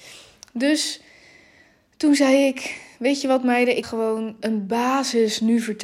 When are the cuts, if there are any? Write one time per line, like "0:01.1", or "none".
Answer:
0:03.8
0:04.4